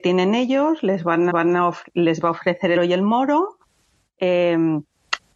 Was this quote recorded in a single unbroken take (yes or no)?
no